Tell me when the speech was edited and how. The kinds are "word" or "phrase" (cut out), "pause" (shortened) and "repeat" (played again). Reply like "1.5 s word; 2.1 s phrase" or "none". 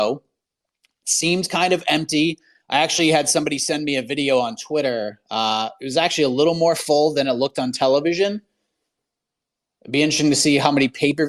none

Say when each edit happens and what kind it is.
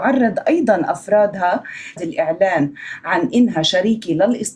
2.0 s phrase

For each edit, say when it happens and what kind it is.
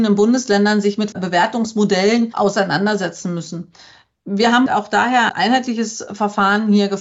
1.1 s word; 4.7 s word; 5.3 s word

